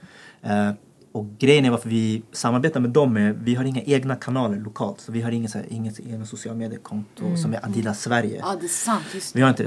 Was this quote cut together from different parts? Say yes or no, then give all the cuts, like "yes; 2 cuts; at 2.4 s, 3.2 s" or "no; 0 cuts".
no; 0 cuts